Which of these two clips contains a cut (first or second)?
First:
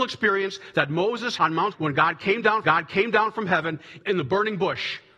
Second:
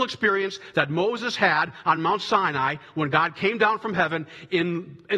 first